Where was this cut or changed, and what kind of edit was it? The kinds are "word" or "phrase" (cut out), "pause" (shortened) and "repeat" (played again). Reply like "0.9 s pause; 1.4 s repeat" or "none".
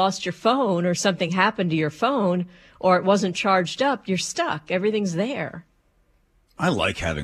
none